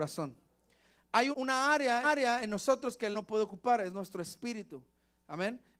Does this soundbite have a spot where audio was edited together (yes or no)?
yes